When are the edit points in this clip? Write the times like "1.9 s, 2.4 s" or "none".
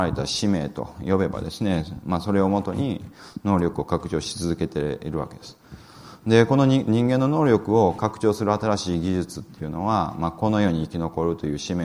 none